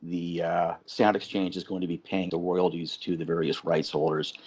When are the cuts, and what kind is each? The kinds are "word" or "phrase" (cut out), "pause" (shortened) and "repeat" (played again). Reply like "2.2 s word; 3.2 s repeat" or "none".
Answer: 2.3 s word